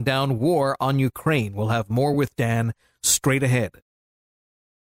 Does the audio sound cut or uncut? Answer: uncut